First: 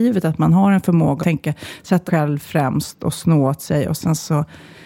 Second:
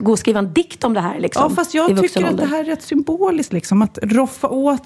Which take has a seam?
first; 2 cuts; at 1.2 s, 2.1 s

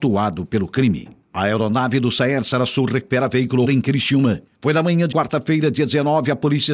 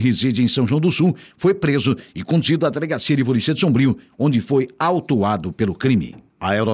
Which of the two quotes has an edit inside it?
first; 2 cuts; at 3.6 s, 5.1 s

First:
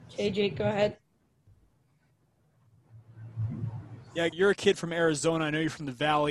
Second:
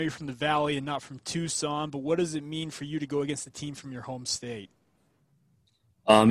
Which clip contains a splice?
first; 1 cut; at 4.3 s

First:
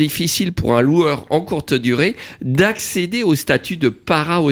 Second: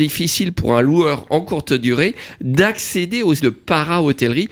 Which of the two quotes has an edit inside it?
second; 1 cut; at 3.4 s

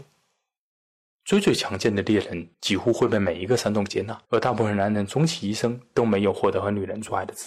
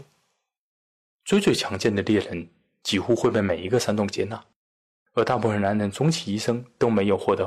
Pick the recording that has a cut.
first; 2 cuts; at 2.5 s, 4.3 s

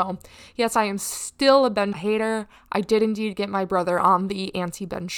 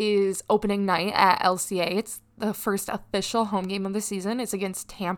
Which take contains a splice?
first; 1 cut; at 1.9 s

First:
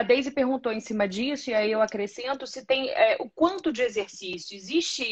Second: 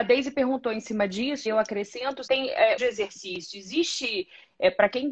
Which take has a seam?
second; 3 cuts; at 1.5 s, 2.3 s, 2.8 s

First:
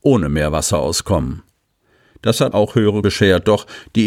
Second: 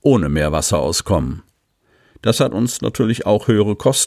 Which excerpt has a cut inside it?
first; 2 cuts; at 2.5 s, 3.0 s

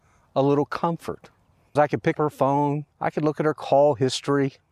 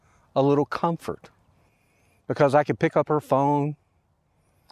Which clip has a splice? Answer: first; 3 cuts; at 1.8 s, 2.1 s, 2.9 s

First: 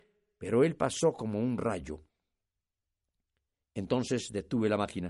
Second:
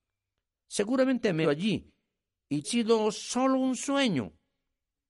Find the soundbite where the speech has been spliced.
second; 2 cuts; at 1.4 s, 2.6 s

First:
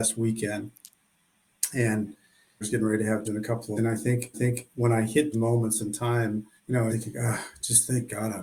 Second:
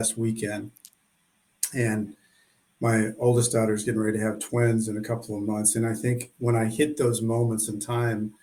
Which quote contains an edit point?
first; 7 cuts; at 2.6 s, 3.2 s, 3.8 s, 4.3 s, 5.3 s, 6.6 s, 6.9 s

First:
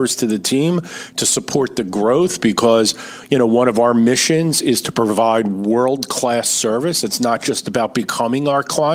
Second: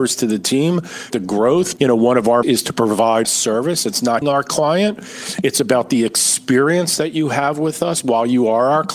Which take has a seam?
second; 5 cuts; at 1.1 s, 1.8 s, 2.4 s, 3.2 s, 4.2 s

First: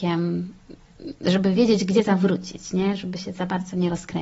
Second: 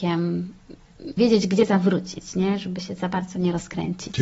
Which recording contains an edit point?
second; 1 cut; at 1.2 s

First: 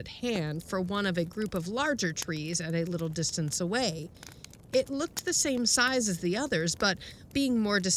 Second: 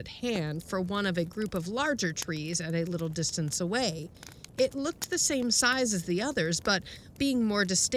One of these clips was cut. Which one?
second; 1 cut; at 4.5 s

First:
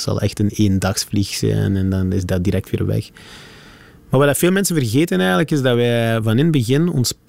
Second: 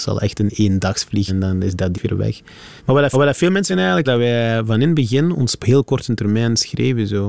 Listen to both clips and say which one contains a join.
second; 7 cuts; at 1.3 s, 1.9 s, 2.8 s, 3.1 s, 3.7 s, 4.0 s, 5.6 s

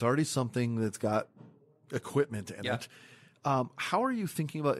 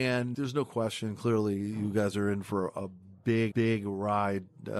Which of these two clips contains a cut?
second; 1 cut; at 3.5 s

